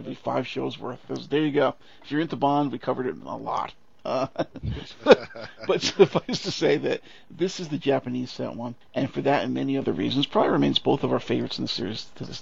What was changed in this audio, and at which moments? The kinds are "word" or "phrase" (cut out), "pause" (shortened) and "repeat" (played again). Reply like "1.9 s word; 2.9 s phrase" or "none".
none